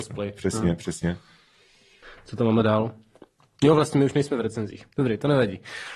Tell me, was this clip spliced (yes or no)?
no